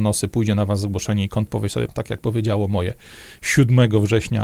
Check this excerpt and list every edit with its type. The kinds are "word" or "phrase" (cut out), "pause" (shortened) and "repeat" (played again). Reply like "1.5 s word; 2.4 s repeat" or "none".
1.5 s word; 1.9 s word